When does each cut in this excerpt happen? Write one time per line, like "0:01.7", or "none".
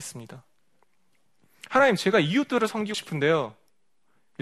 0:02.9